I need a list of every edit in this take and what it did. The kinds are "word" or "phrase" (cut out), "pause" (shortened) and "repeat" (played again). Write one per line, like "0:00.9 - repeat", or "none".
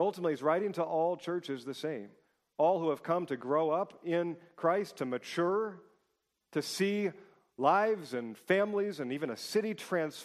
none